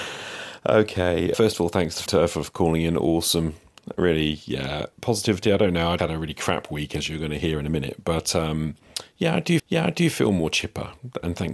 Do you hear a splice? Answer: yes; 5 cuts; at 1.3 s, 2.1 s, 4.9 s, 6.0 s, 9.6 s

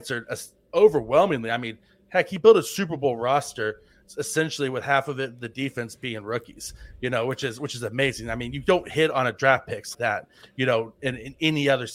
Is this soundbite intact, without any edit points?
no; 1 cut; at 9.9 s

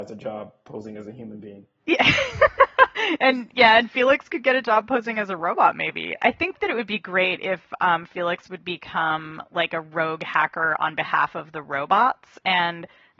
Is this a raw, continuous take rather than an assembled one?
yes; 0 cuts

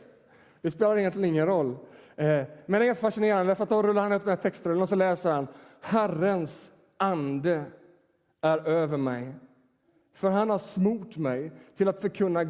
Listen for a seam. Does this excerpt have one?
no; 0 cuts

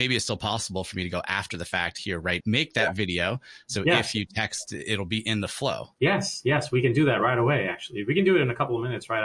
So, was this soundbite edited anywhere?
yes; 2 cuts; at 2.4 s, 5.9 s

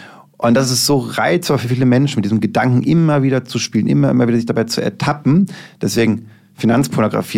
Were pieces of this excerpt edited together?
no; 0 cuts

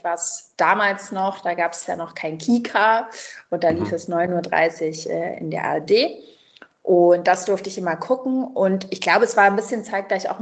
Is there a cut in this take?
no; 0 cuts

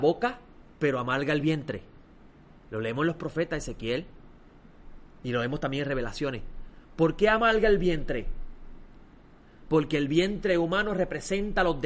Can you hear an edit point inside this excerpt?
no; 0 cuts

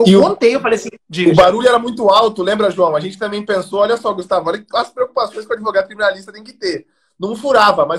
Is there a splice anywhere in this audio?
yes; 1 cut; at 1.0 s

